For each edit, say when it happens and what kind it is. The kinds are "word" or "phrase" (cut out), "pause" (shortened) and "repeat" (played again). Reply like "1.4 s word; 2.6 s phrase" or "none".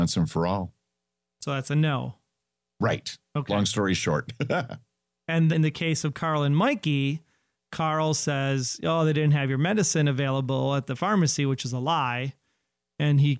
5.5 s word

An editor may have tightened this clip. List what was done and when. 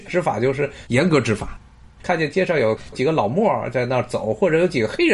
none

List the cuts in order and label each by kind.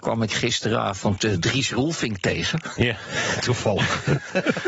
none

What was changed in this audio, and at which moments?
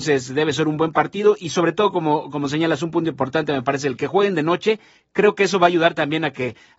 none

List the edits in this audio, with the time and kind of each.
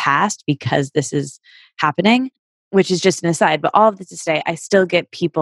none

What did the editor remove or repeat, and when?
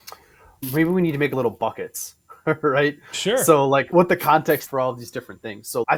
3.9 s word; 4.7 s word

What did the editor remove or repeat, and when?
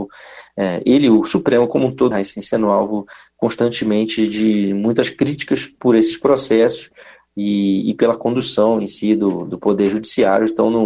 2.1 s word

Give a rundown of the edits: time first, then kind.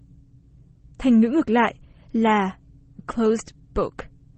3.0 s word

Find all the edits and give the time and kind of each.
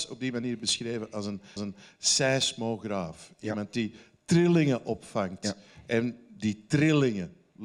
1.6 s repeat

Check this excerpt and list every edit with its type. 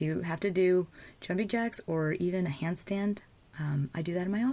none

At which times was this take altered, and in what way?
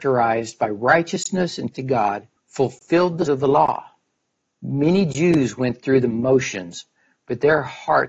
1.7 s word; 2.4 s pause; 3.3 s word

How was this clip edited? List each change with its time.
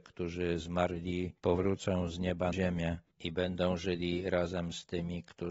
2.5 s word

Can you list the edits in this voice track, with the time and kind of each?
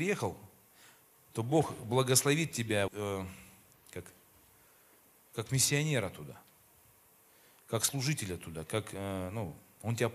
2.9 s word

